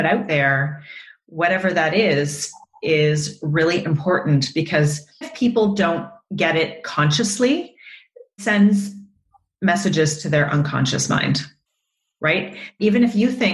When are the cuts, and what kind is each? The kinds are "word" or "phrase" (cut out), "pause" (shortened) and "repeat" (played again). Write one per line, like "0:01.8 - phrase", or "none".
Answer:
0:05.2 - word
0:08.4 - word